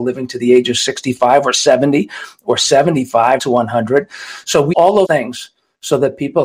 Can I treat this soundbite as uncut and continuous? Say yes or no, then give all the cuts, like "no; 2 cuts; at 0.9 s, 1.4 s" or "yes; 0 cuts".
no; 3 cuts; at 3.4 s, 4.7 s, 5.0 s